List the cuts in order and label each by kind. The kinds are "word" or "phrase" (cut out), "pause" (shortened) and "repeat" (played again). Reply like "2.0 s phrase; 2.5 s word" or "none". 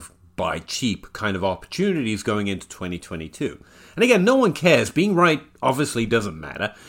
none